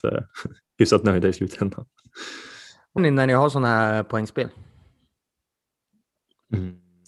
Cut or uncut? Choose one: cut